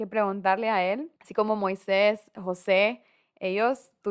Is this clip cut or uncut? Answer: cut